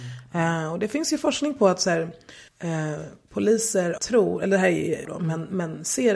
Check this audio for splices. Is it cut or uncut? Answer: cut